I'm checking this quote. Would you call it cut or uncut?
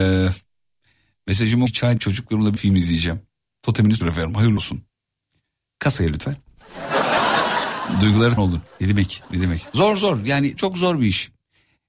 cut